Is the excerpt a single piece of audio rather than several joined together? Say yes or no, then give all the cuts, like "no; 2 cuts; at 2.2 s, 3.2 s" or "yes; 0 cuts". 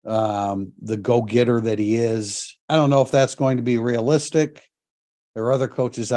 no; 1 cut; at 2.6 s